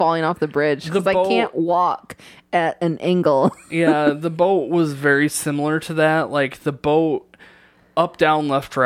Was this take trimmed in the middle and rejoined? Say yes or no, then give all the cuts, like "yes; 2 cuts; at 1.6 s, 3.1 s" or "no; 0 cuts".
no; 0 cuts